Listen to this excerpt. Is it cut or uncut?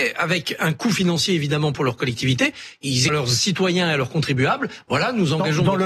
cut